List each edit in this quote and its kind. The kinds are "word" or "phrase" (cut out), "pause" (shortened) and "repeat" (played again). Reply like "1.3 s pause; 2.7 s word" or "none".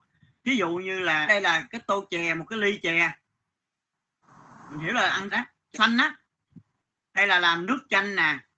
1.3 s word; 5.3 s word; 5.7 s word